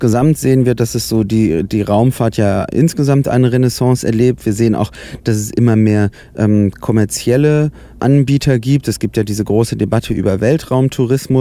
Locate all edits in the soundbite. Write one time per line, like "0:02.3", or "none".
0:08.0